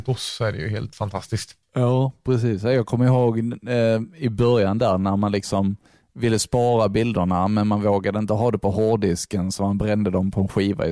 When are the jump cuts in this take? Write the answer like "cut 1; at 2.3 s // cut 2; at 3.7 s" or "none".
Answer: cut 1; at 1.6 s